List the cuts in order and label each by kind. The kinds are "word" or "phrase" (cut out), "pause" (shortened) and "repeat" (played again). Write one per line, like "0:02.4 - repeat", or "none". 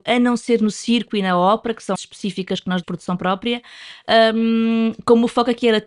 0:01.9 - word
0:02.8 - word